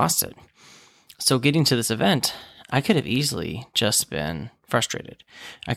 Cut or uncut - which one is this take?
uncut